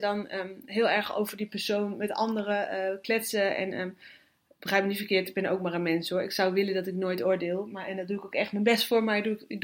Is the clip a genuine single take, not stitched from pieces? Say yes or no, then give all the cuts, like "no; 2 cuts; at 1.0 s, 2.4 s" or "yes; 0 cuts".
yes; 0 cuts